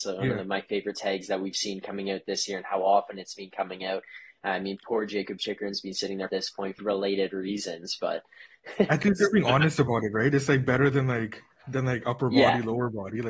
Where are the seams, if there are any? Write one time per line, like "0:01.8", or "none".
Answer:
0:06.3
0:06.8